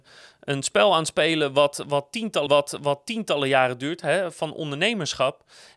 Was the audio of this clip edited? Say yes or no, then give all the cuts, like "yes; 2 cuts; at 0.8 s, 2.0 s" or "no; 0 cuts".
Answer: yes; 1 cut; at 2.5 s